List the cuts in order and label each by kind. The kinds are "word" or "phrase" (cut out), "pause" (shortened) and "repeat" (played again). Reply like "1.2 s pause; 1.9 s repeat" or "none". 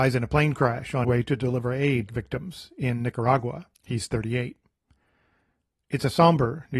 1.0 s word; 2.1 s phrase; 3.7 s pause

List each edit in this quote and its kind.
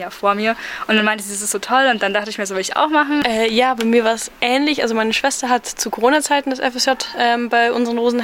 none

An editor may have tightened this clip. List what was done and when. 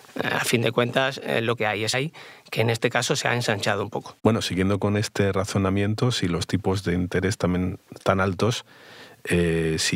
1.6 s phrase; 1.9 s phrase; 4.2 s pause

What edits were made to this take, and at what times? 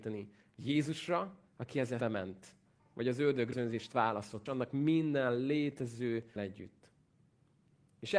1.5 s pause; 2.0 s word; 2.8 s pause; 3.5 s phrase; 4.5 s word; 6.4 s word

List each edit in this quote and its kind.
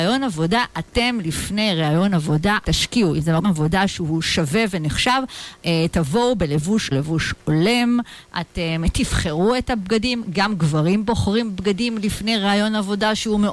2.6 s word; 3.4 s word; 5.6 s word; 6.9 s word

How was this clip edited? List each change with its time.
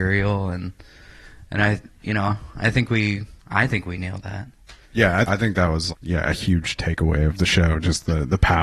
3.4 s pause; 4.8 s pause; 5.3 s word; 5.9 s word

